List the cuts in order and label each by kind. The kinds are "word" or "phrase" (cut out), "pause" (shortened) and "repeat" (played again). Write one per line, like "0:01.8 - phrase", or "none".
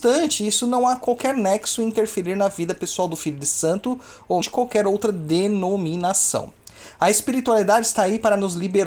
0:04.4 - phrase